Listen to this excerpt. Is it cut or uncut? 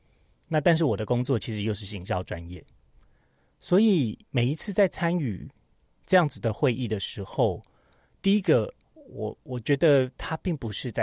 cut